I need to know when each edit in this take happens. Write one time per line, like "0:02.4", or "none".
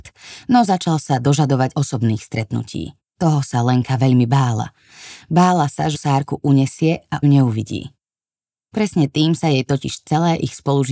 0:01.7
0:03.1
0:05.9
0:07.2

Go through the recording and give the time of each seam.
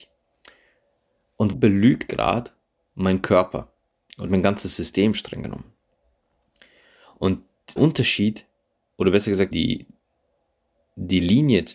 0:01.5
0:02.1
0:04.3
0:07.8
0:08.9
0:09.5

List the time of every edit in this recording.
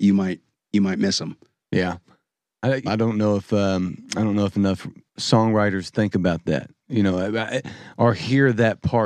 0:02.9
0:05.1

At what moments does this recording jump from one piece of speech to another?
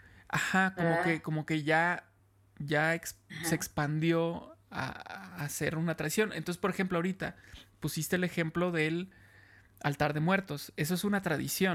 none

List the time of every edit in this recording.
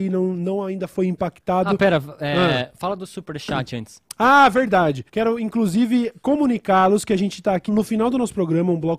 0:05.1
0:07.7

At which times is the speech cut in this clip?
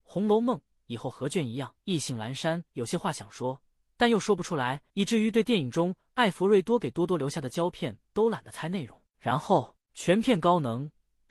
0:01.8
0:02.7
0:04.9
0:09.8

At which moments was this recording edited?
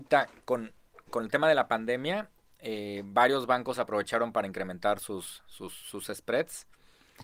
none

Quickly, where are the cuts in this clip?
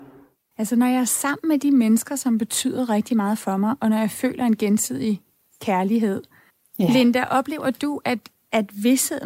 0:06.5

